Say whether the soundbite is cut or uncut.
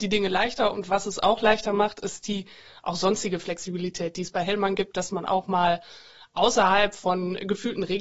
uncut